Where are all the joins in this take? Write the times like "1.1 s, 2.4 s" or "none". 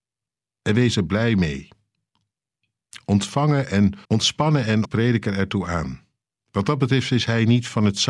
4.0 s, 4.8 s